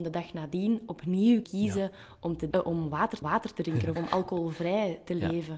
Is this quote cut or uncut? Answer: cut